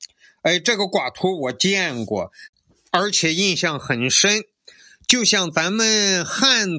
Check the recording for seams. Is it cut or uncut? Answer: uncut